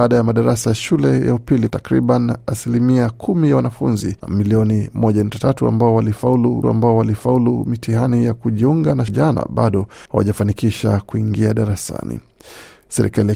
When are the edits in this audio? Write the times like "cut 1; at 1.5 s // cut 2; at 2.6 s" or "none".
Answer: cut 1; at 1.7 s // cut 2; at 4.2 s // cut 3; at 6.6 s // cut 4; at 9.1 s // cut 5; at 10.1 s